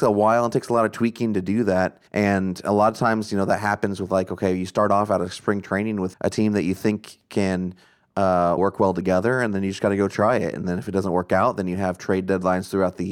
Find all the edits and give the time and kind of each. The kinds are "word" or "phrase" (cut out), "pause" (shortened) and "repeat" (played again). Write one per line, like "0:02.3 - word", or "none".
0:02.1 - pause
0:06.1 - word
0:08.6 - word